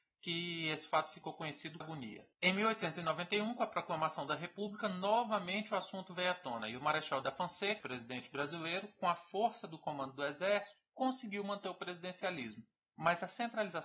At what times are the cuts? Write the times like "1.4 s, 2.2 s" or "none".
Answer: 1.8 s, 2.3 s, 7.2 s, 7.8 s, 10.9 s